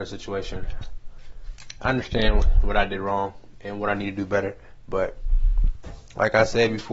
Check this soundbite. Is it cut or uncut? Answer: uncut